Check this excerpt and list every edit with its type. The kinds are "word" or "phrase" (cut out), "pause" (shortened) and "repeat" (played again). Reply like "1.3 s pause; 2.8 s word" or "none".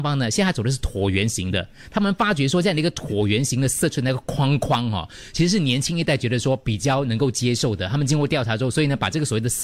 none